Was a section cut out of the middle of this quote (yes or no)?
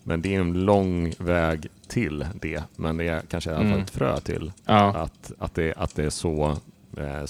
yes